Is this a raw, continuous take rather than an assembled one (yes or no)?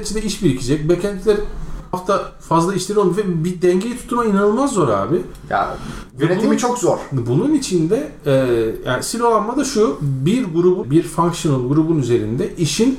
no